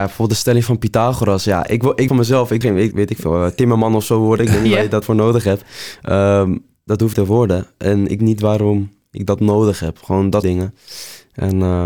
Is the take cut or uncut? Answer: cut